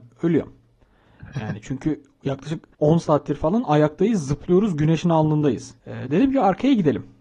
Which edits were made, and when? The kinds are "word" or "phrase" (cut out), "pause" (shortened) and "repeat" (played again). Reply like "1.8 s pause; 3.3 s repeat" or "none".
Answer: 2.7 s pause; 5.8 s pause